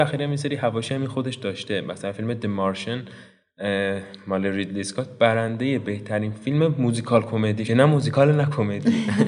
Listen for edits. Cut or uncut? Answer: cut